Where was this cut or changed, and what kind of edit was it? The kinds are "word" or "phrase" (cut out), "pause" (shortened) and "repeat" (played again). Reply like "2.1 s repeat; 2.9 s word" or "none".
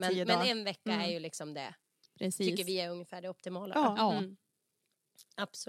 none